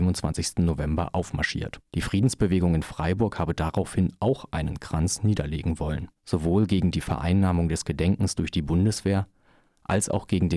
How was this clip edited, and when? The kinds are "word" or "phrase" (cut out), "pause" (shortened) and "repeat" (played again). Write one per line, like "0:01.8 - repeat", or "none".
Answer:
0:01.9 - pause
0:06.2 - pause